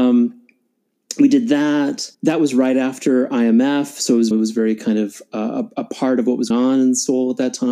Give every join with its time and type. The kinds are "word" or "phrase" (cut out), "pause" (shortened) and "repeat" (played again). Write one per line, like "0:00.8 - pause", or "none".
0:02.1 - pause
0:04.3 - phrase
0:06.5 - word